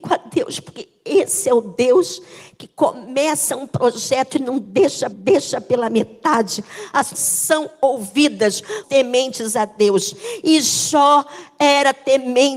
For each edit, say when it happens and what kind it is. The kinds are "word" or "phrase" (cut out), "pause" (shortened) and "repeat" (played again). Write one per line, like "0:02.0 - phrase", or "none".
0:05.1 - repeat
0:07.1 - phrase
0:08.8 - phrase